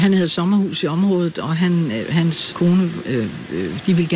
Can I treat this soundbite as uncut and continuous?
no; 1 cut; at 2.5 s

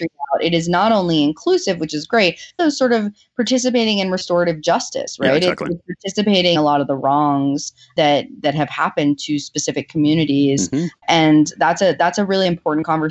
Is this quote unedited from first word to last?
no; 2 cuts; at 2.6 s, 6.5 s

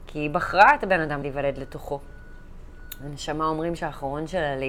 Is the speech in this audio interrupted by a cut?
yes; 2 cuts; at 1.2 s, 3.8 s

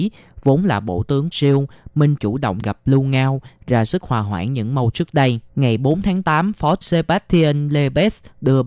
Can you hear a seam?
yes; 6 cuts; at 1.3 s, 2.2 s, 2.6 s, 4.9 s, 5.5 s, 6.8 s

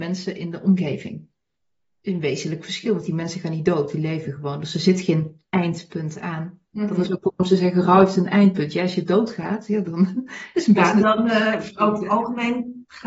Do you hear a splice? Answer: no; 0 cuts

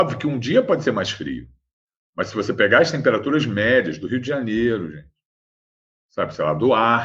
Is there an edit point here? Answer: no; 0 cuts

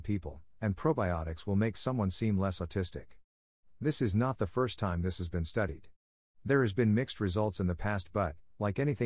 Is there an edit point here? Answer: no; 0 cuts

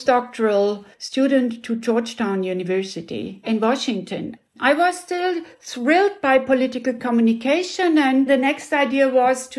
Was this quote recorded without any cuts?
no; 1 cut; at 0.9 s

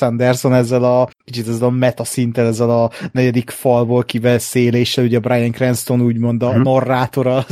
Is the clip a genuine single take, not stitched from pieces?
no; 1 cut; at 1.1 s

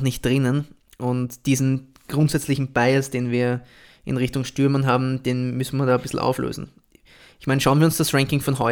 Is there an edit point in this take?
no; 0 cuts

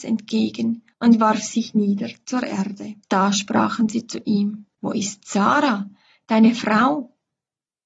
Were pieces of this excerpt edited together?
yes; 3 cuts; at 0.9 s, 3.0 s, 4.7 s

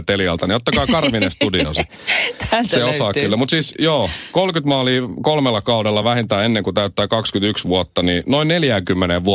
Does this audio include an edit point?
no; 0 cuts

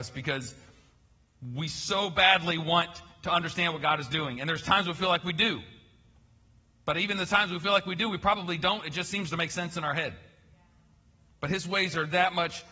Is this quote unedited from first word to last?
yes; 0 cuts

